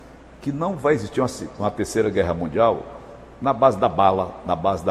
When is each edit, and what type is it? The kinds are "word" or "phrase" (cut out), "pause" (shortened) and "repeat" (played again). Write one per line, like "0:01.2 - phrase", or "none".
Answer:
none